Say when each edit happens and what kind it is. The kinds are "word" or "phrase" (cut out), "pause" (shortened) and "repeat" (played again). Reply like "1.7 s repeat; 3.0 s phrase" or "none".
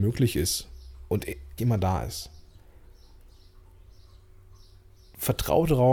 1.6 s word